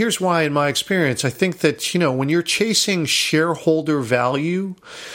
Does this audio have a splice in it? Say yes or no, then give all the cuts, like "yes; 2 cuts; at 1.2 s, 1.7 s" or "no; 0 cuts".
no; 0 cuts